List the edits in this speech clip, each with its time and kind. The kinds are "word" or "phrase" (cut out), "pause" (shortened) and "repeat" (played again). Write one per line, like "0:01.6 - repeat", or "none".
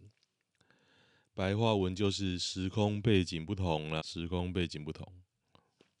0:04.0 - word